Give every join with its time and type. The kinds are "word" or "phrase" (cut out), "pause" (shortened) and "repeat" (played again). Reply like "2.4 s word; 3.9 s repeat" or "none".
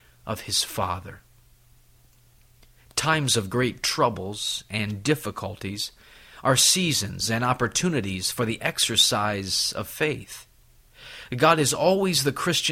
none